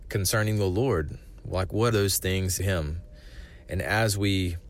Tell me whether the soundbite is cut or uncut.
cut